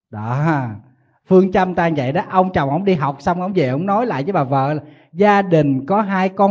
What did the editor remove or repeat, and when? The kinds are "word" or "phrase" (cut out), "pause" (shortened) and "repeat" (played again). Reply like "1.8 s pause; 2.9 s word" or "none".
none

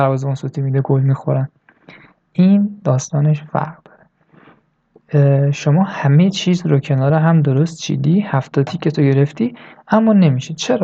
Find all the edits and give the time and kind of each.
none

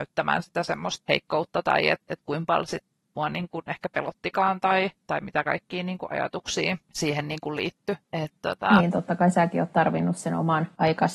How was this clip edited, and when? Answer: none

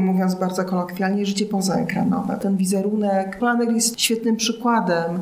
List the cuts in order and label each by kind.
none

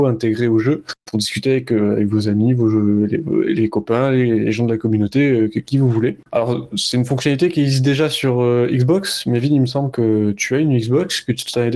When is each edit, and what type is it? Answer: 1.0 s pause; 6.2 s pause

